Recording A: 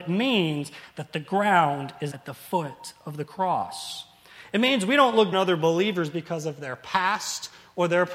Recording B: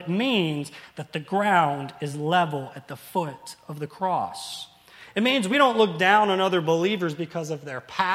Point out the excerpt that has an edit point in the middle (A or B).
A